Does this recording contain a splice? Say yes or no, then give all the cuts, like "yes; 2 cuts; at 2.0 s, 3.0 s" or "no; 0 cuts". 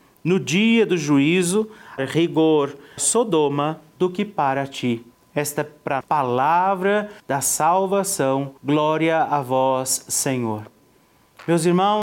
yes; 6 cuts; at 2.0 s, 3.0 s, 5.1 s, 6.0 s, 7.2 s, 8.6 s